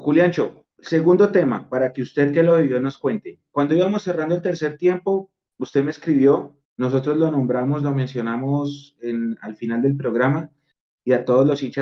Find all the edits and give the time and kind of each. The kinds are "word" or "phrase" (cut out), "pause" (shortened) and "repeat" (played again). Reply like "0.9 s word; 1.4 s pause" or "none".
6.6 s pause